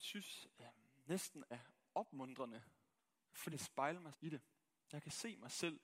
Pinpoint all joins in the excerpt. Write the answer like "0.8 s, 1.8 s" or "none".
1.5 s, 3.5 s, 4.1 s